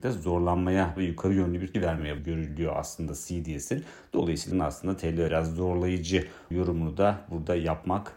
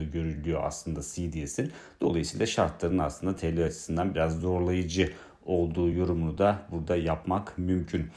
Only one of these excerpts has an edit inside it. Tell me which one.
first; 6 cuts; at 1.0 s, 1.7 s, 2.2 s, 4.5 s, 5.3 s, 6.5 s

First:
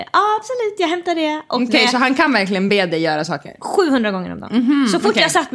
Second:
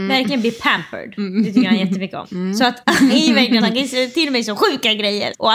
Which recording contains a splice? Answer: second; 2 cuts; at 3.1 s, 3.6 s

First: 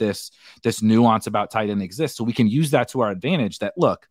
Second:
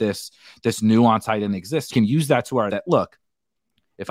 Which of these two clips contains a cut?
second; 3 cuts; at 1.2 s, 1.9 s, 2.7 s

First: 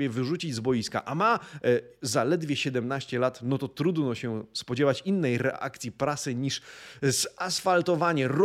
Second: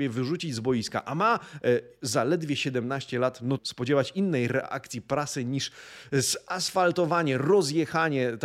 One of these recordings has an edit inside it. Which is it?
second; 1 cut; at 3.6 s

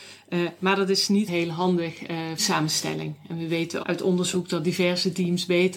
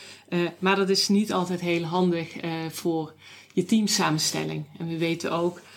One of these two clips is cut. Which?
first; 3 cuts; at 1.3 s, 2.4 s, 3.8 s

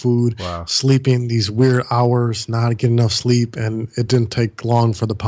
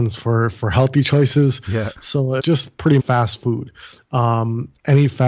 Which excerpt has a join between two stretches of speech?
second; 2 cuts; at 2.4 s, 3.0 s

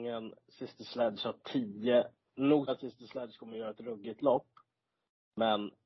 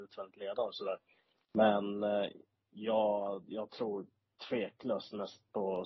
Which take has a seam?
first; 1 cut; at 2.7 s

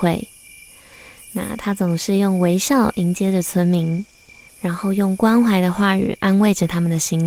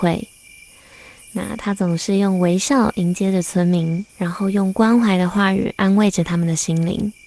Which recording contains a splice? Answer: second; 1 cut; at 4.1 s

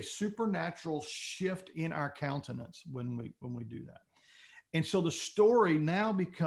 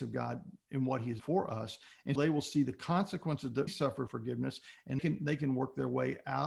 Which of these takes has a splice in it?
second; 5 cuts; at 1.2 s, 2.2 s, 3.7 s, 4.1 s, 5.0 s

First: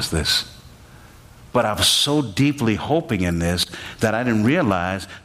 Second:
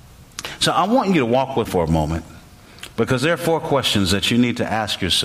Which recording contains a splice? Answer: second; 2 cuts; at 1.6 s, 2.9 s

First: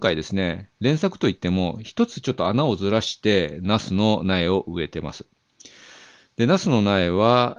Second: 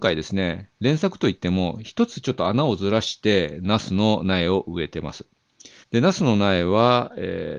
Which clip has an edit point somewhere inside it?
second; 1 cut; at 5.8 s

